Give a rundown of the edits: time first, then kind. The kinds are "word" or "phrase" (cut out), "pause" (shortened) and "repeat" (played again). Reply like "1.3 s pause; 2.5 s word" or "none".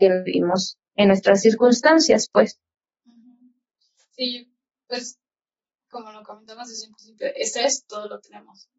none